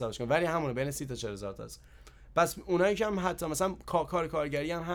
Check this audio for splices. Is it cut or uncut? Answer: uncut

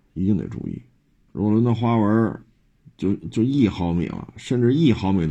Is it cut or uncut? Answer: cut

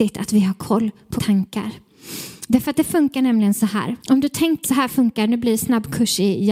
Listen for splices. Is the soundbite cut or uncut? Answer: cut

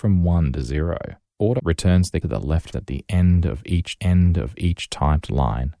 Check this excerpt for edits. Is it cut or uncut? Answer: cut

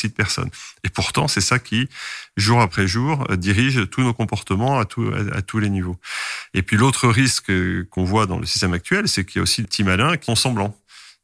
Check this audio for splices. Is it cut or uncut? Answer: cut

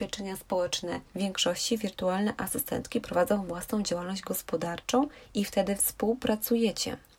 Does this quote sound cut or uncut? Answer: cut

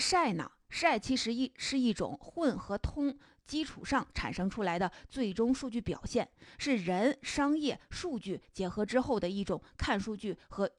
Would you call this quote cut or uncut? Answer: uncut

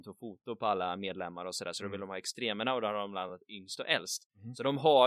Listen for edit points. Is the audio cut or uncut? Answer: uncut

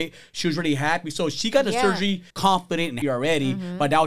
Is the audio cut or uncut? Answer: cut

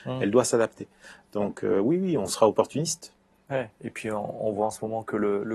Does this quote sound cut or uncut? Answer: uncut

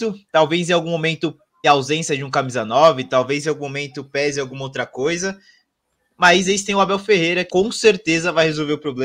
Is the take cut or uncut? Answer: cut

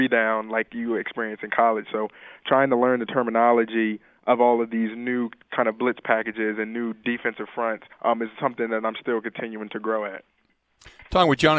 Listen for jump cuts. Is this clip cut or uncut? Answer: cut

